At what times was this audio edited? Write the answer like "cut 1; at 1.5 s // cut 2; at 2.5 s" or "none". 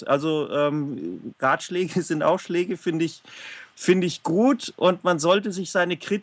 cut 1; at 1.3 s